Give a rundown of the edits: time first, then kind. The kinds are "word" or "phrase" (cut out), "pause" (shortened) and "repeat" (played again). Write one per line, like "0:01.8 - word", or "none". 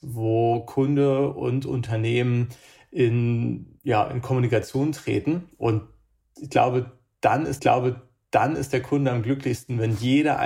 0:07.6 - repeat